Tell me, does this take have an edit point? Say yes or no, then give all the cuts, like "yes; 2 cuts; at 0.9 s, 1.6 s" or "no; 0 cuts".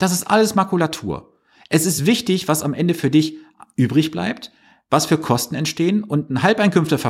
no; 0 cuts